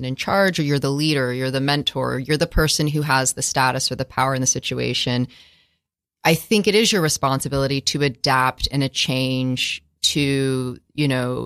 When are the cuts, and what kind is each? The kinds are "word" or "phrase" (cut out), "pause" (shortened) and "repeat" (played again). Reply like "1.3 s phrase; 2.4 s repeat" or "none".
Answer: none